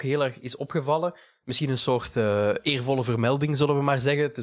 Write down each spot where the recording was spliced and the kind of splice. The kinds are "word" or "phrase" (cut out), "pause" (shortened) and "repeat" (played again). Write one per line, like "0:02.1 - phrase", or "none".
none